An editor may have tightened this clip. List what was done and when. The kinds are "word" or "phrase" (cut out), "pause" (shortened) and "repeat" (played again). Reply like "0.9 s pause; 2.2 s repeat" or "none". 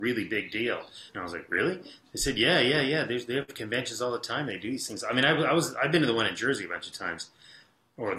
1.1 s pause